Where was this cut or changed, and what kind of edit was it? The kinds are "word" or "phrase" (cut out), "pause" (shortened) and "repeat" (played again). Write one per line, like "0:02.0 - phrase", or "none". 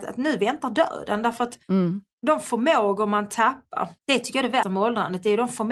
0:01.6 - pause
0:04.0 - pause
0:04.6 - word